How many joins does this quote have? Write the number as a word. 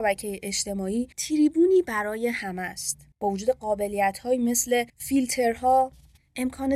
three